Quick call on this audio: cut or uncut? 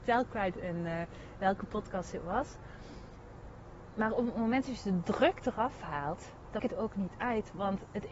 cut